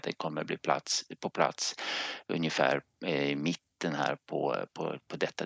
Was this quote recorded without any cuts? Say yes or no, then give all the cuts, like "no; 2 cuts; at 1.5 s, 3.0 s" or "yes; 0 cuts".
yes; 0 cuts